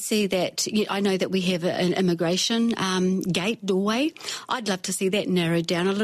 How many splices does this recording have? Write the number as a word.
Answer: zero